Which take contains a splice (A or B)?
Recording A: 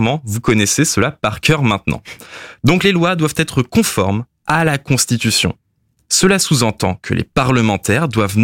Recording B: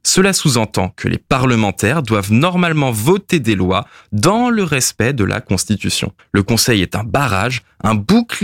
B